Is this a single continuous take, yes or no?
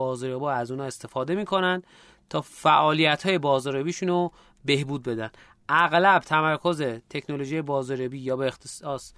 yes